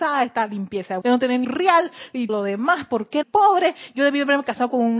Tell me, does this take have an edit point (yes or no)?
yes